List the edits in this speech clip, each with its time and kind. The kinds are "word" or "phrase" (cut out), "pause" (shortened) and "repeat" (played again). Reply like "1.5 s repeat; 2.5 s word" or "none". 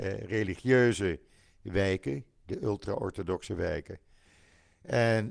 none